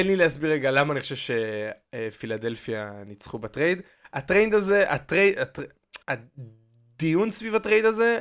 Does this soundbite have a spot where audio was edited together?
yes; 1 cut; at 6.0 s

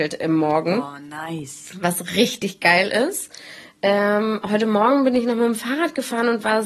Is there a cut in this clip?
no; 0 cuts

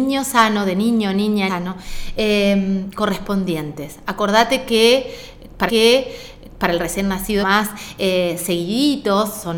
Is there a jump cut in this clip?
yes; 3 cuts; at 1.5 s, 5.7 s, 7.4 s

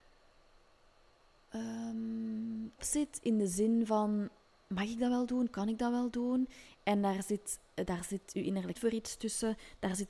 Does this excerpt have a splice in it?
yes; 2 cuts; at 2.8 s, 8.7 s

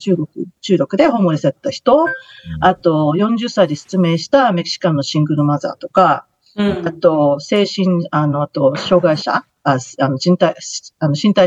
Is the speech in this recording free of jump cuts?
yes; 0 cuts

